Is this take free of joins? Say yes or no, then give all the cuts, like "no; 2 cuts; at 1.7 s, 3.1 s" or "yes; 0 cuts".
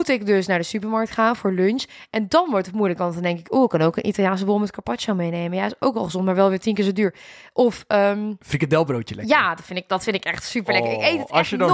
yes; 0 cuts